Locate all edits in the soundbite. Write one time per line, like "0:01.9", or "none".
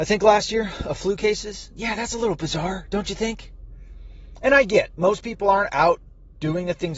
none